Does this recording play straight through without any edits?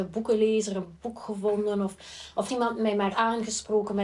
no; 2 cuts; at 2.5 s, 3.1 s

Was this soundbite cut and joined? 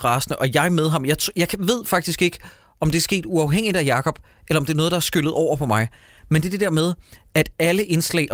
no; 0 cuts

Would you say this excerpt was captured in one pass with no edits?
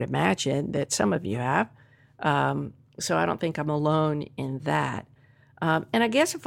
yes; 0 cuts

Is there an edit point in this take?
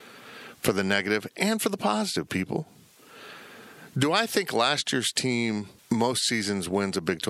yes; 1 cut; at 5.8 s

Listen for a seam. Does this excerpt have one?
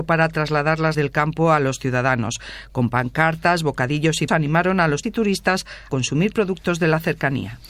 yes; 4 cuts; at 0.9 s, 4.3 s, 5.0 s, 5.9 s

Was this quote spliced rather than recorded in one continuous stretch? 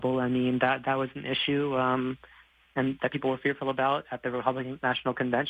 no; 0 cuts

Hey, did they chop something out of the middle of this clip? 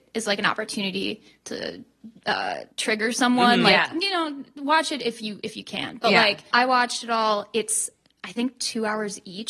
yes; 2 cuts; at 2.7 s, 6.5 s

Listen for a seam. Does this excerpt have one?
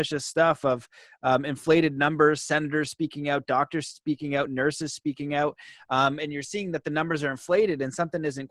no; 0 cuts

